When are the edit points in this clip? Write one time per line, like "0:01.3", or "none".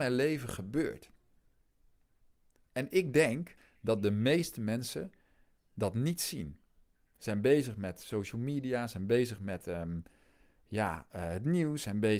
none